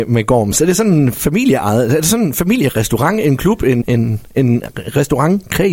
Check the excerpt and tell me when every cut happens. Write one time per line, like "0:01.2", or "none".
0:03.8